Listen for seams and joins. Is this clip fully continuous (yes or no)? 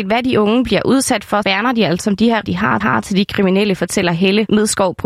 no